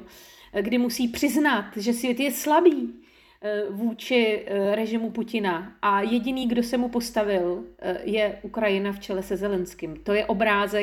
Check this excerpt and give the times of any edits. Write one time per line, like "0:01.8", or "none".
none